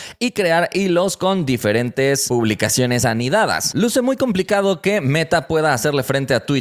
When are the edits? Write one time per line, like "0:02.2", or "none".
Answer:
none